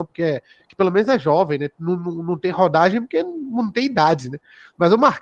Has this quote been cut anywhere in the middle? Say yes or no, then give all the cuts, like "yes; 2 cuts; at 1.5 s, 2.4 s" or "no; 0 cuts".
no; 0 cuts